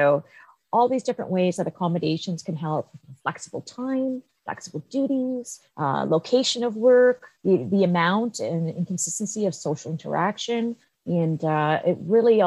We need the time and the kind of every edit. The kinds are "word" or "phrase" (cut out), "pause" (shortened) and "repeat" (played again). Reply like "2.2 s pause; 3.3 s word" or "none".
5.7 s pause; 7.3 s pause; 10.9 s pause